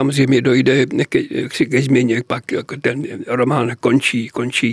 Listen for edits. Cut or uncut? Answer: uncut